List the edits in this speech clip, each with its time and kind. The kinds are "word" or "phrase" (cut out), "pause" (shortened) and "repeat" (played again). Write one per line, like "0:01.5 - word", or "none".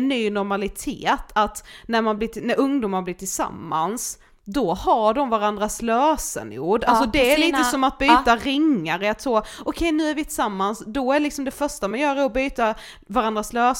none